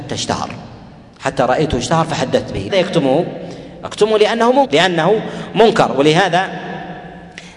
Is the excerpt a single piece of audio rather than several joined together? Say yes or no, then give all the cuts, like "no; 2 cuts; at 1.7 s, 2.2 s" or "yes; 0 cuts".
no; 2 cuts; at 2.7 s, 4.6 s